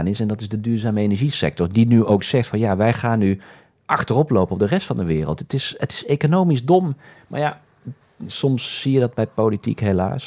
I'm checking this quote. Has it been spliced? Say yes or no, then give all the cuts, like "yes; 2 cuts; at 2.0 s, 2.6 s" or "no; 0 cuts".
no; 0 cuts